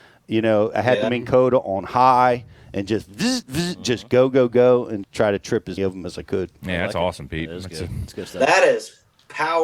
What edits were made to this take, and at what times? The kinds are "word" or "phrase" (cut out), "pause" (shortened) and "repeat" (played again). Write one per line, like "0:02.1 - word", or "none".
0:03.4 - word
0:05.0 - phrase
0:05.8 - word